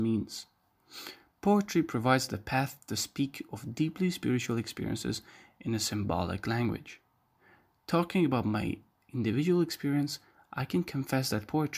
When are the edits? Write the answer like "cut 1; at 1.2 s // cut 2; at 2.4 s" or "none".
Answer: none